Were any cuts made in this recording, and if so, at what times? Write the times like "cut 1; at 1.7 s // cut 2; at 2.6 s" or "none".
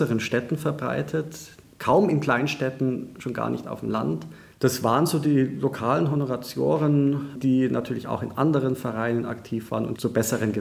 none